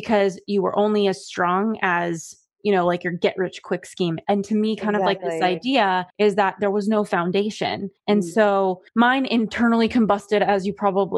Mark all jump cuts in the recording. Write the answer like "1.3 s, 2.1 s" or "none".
6.1 s, 8.0 s, 8.9 s